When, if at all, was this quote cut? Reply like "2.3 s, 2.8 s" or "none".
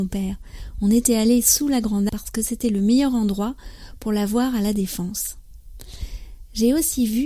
2.1 s